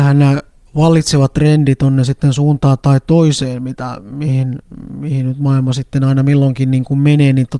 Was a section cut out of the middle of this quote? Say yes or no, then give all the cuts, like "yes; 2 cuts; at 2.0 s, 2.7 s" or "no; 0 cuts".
no; 0 cuts